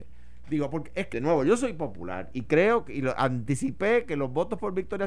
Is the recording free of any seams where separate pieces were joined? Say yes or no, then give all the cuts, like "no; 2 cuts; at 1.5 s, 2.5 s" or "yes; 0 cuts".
no; 1 cut; at 1.1 s